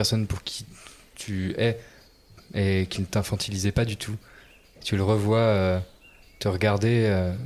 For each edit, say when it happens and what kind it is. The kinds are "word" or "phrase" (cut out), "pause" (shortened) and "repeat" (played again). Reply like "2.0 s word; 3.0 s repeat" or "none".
none